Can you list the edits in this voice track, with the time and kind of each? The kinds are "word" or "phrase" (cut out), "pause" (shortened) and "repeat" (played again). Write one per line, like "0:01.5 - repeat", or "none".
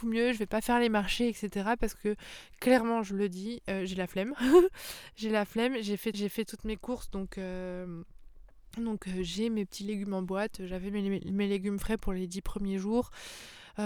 0:06.1 - repeat

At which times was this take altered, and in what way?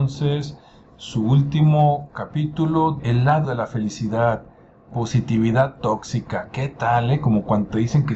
0:03.0 - word
0:03.4 - word

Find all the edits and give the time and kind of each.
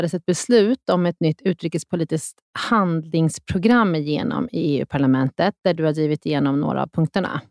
none

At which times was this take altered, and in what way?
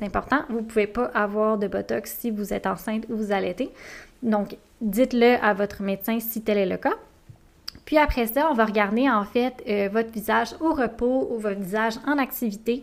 none

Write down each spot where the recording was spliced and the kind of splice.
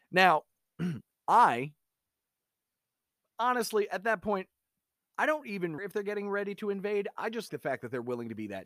0:05.8 - phrase
0:07.5 - word

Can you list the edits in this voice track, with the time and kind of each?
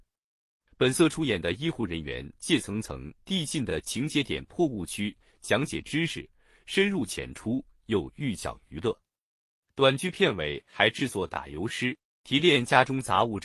none

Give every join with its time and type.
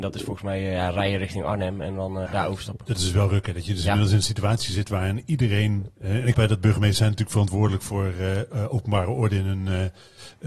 0:02.3 - word
0:06.3 - word

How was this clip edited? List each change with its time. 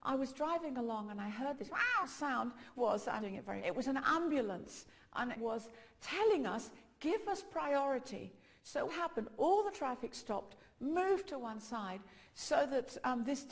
0:02.0 - word
0:02.7 - word
0:03.2 - word
0:03.6 - word
0:05.3 - word
0:08.9 - word

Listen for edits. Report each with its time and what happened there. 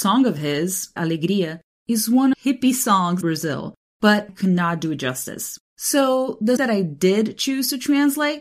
0:01.0 - word
0:02.3 - phrase
0:03.2 - word
0:04.3 - word
0:05.7 - pause
0:06.6 - word

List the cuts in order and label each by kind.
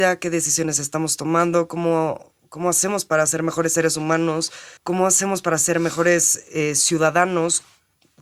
0:04.8 - pause

